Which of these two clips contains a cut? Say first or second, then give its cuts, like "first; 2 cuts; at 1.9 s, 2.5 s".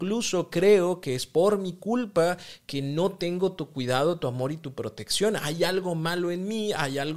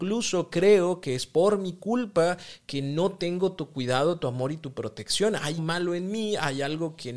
second; 1 cut; at 5.6 s